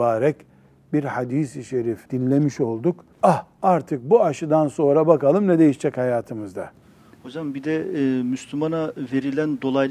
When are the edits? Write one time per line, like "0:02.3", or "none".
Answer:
0:02.1
0:03.1
0:06.8